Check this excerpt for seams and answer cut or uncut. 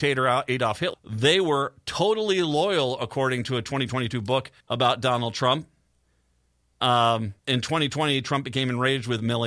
cut